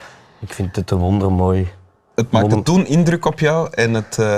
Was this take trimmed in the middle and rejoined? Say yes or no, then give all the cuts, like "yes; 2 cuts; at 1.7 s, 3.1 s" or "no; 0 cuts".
no; 0 cuts